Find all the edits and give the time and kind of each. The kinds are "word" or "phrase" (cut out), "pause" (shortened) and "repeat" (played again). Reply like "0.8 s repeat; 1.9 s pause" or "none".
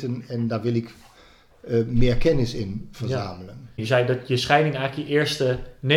none